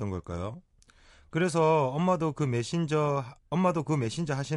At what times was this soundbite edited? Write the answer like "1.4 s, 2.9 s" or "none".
3.4 s